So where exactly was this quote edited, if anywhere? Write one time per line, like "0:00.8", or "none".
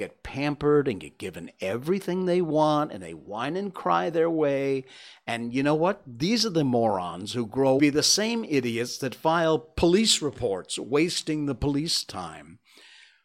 0:07.8